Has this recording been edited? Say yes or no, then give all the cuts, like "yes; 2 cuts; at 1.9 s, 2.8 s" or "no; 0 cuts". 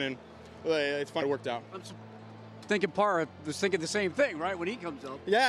yes; 1 cut; at 1.2 s